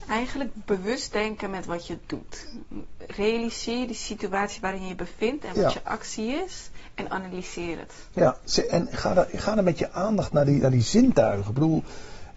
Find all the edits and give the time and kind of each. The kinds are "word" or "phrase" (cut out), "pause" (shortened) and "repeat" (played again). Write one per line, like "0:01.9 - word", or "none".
none